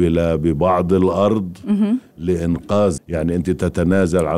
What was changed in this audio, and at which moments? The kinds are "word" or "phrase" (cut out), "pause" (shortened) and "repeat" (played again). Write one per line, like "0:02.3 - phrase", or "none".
0:03.0 - word